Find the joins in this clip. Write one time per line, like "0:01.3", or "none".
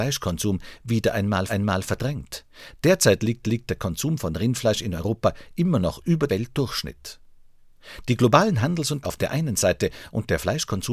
0:01.5
0:03.4
0:06.3
0:09.0